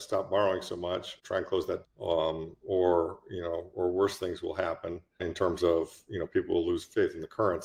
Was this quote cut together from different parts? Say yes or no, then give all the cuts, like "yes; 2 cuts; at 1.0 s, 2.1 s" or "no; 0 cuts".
yes; 4 cuts; at 1.2 s, 1.8 s, 3.7 s, 5.2 s